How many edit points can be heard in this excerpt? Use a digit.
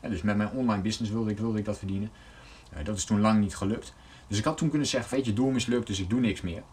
2